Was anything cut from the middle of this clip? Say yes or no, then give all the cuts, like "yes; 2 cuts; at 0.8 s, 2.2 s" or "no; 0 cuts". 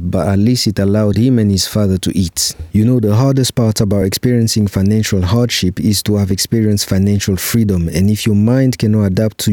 no; 0 cuts